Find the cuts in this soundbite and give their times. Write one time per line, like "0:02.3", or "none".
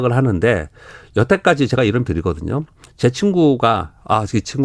0:02.1